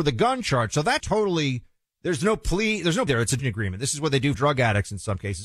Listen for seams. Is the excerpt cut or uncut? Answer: cut